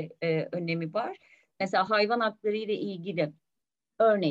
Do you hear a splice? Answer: no; 0 cuts

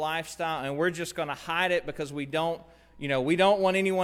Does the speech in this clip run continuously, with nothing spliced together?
yes; 0 cuts

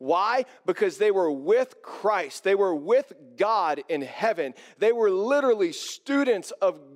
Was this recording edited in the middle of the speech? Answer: no; 0 cuts

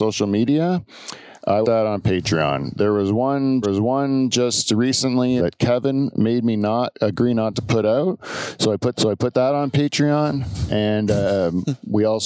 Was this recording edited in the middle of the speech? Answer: yes; 4 cuts; at 1.6 s, 3.6 s, 5.4 s, 8.9 s

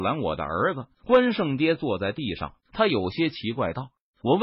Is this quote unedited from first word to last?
no; 2 cuts; at 0.9 s, 2.6 s

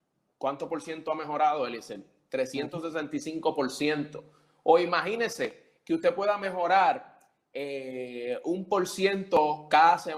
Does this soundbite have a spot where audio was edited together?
no; 0 cuts

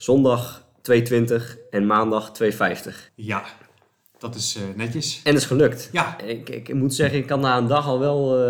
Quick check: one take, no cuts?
yes; 0 cuts

